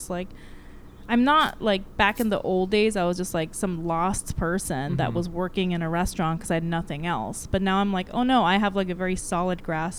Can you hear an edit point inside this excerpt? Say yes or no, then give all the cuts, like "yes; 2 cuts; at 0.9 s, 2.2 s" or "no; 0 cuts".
no; 0 cuts